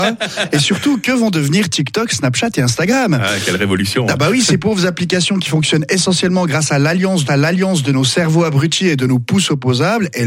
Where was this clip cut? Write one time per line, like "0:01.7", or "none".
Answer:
0:07.3